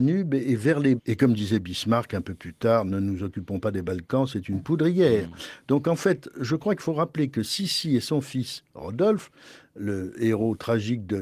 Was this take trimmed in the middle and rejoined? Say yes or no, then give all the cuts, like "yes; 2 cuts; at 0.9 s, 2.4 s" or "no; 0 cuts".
yes; 1 cut; at 1.0 s